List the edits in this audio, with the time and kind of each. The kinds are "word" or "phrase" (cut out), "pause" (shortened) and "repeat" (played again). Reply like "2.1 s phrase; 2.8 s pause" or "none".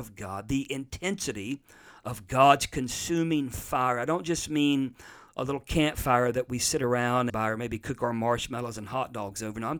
7.3 s phrase